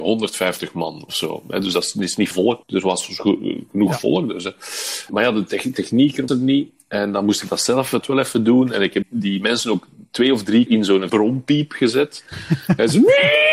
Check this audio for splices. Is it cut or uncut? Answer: cut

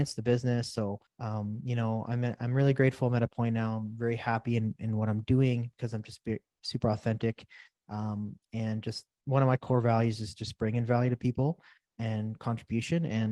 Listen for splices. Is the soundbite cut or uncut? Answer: cut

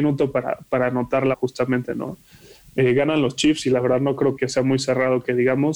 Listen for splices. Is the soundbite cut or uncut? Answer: cut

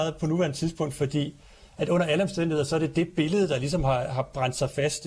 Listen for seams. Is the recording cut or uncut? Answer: uncut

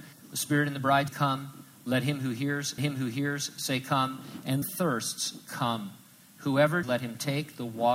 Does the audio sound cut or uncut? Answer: cut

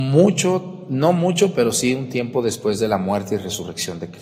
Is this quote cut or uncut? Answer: uncut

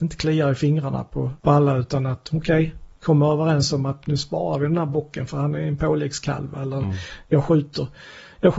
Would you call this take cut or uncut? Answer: cut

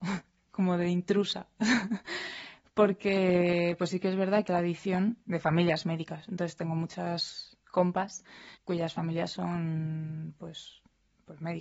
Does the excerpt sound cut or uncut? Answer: cut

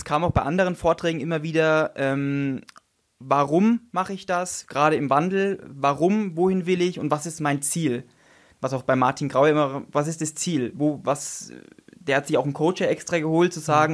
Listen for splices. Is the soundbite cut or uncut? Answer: uncut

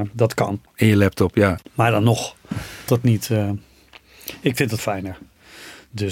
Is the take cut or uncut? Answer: cut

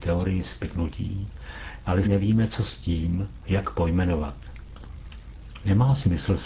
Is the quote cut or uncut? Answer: cut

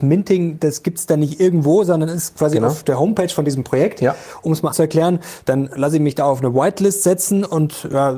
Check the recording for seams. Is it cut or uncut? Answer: cut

